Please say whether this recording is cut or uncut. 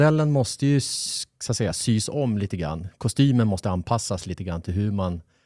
uncut